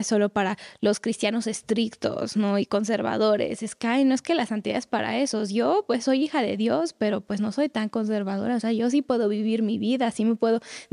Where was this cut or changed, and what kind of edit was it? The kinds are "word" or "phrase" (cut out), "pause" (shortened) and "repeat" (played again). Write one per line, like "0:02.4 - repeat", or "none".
none